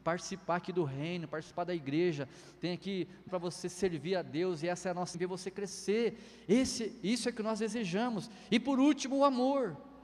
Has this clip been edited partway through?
yes; 2 cuts; at 3.3 s, 5.1 s

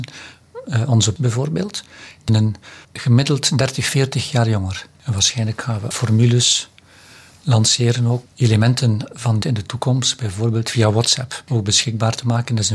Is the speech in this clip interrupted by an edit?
yes; 6 cuts; at 1.2 s, 2.3 s, 2.8 s, 5.9 s, 8.3 s, 9.4 s

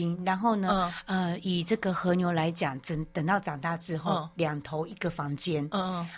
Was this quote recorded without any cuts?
yes; 0 cuts

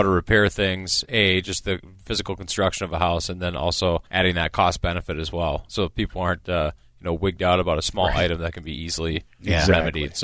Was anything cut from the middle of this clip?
yes; 1 cut; at 4.1 s

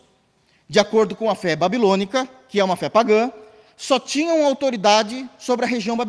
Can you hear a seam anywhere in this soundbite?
no; 0 cuts

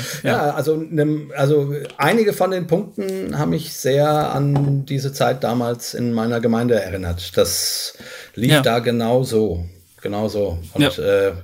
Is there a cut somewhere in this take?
no; 0 cuts

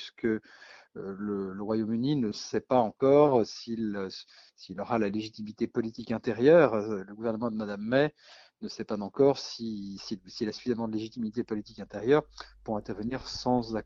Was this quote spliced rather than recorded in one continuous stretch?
no; 0 cuts

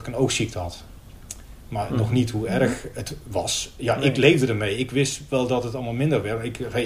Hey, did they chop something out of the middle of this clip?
no; 0 cuts

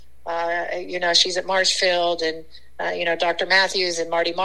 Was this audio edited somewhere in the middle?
no; 0 cuts

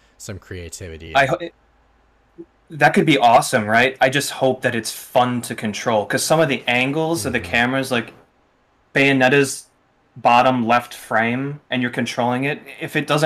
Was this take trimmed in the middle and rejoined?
no; 0 cuts

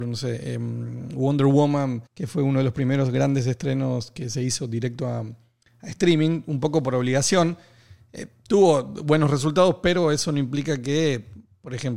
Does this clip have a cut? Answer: yes; 1 cut; at 2.1 s

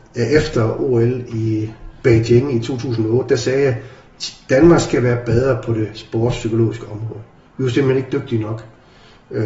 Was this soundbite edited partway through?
no; 0 cuts

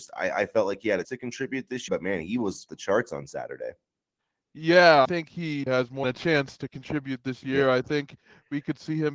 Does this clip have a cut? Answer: yes; 6 cuts; at 1.0 s, 1.9 s, 2.7 s, 5.0 s, 5.7 s, 6.0 s

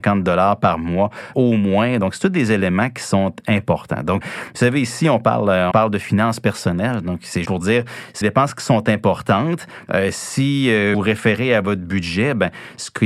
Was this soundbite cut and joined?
yes; 6 cuts; at 1.3 s, 4.2 s, 5.7 s, 7.4 s, 8.2 s, 10.9 s

